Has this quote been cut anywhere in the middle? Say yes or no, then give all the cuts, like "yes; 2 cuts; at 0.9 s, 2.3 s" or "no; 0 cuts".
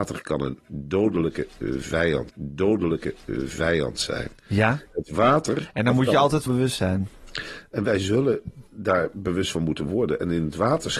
yes; 3 cuts; at 2.3 s, 6.5 s, 8.7 s